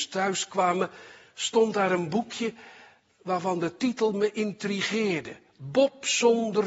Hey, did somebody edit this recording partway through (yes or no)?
no